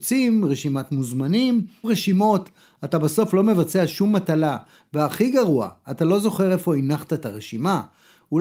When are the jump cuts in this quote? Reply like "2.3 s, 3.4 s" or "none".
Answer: 1.8 s